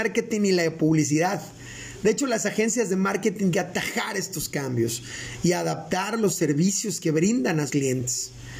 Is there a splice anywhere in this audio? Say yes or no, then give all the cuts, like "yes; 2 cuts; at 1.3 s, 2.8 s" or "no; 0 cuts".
yes; 2 cuts; at 3.5 s, 7.7 s